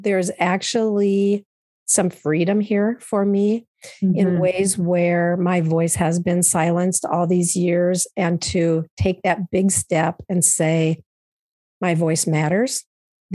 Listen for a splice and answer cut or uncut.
uncut